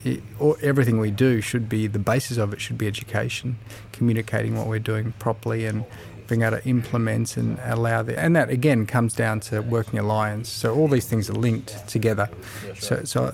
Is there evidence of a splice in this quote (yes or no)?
yes